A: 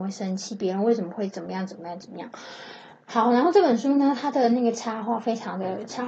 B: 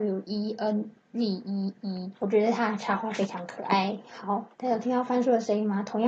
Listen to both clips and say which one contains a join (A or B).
B